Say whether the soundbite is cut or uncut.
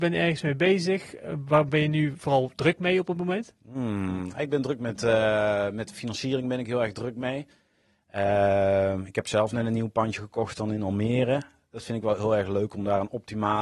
uncut